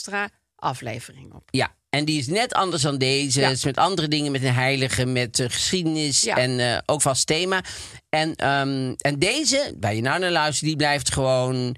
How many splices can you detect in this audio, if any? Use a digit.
1